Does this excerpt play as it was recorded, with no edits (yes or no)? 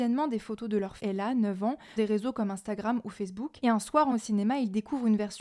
no